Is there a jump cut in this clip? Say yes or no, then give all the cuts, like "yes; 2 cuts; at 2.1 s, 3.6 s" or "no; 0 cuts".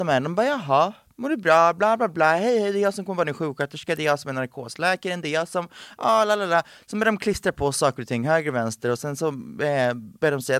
no; 0 cuts